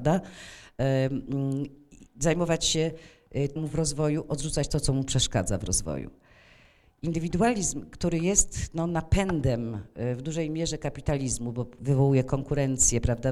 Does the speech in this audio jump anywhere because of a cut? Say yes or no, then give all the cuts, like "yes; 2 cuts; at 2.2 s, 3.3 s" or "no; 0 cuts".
yes; 1 cut; at 3.6 s